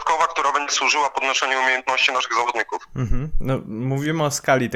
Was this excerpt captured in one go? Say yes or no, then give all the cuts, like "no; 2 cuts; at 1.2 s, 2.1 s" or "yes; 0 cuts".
yes; 0 cuts